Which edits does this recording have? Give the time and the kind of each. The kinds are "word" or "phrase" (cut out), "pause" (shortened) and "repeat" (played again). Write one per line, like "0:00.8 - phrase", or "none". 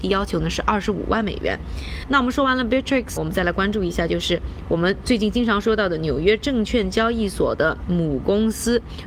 0:03.2 - word